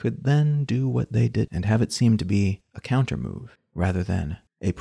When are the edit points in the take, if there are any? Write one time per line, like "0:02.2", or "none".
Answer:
0:01.5